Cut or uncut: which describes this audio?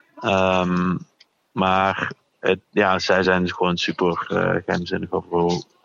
uncut